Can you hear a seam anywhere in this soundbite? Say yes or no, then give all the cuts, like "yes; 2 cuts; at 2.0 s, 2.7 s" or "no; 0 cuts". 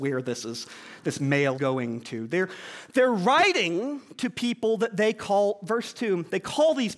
yes; 1 cut; at 1.5 s